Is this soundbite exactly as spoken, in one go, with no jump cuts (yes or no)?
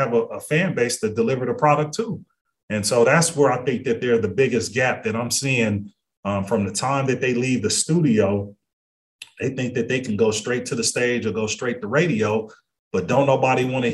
yes